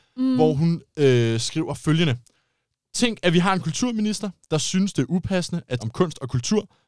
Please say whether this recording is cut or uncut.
cut